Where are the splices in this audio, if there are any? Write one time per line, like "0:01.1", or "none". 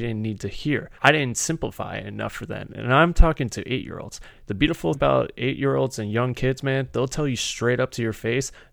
0:01.0
0:04.9